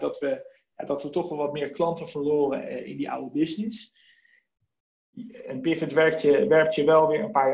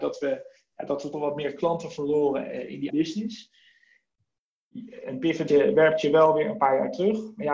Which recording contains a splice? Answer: second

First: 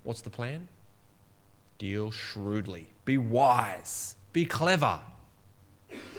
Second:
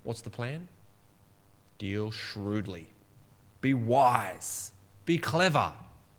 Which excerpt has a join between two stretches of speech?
first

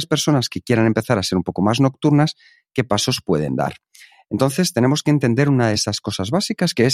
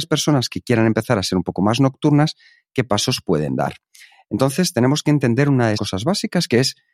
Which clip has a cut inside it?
second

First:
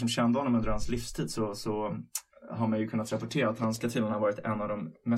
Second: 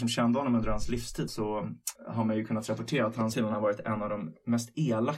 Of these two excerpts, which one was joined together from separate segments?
second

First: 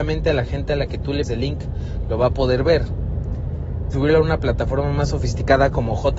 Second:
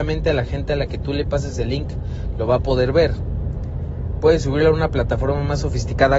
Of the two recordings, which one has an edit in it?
first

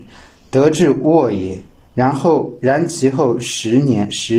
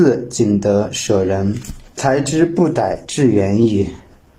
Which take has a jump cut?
second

